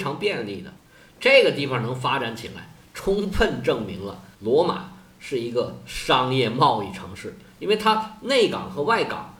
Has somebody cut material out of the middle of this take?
yes; 1 cut; at 4.3 s

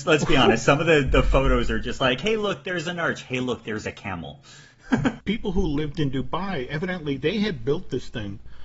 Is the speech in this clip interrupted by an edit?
no; 0 cuts

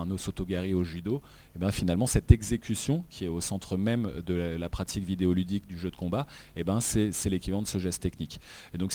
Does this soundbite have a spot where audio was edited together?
no; 0 cuts

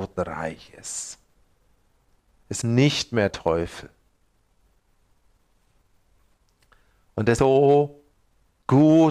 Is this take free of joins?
no; 3 cuts; at 2.6 s, 3.3 s, 7.4 s

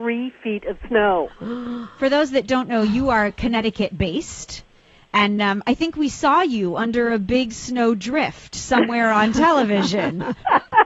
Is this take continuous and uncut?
yes; 0 cuts

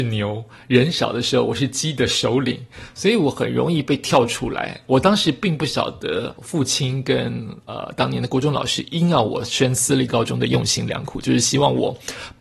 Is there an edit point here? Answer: yes; 1 cut; at 6.4 s

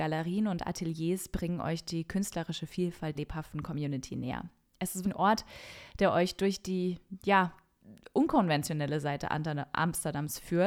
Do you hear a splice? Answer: yes; 2 cuts; at 3.1 s, 5.0 s

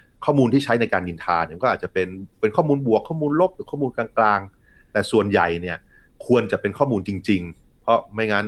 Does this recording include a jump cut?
no; 0 cuts

